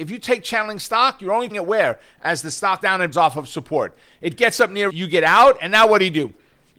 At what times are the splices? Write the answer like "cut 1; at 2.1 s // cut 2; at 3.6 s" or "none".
cut 1; at 1.5 s // cut 2; at 2.8 s // cut 3; at 3.1 s // cut 4; at 4.9 s